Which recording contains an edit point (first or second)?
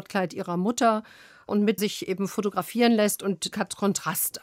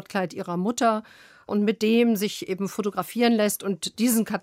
first